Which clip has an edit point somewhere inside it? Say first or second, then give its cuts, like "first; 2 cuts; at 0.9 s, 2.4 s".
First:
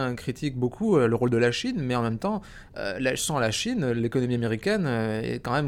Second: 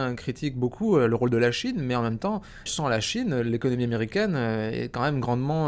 second; 1 cut; at 2.7 s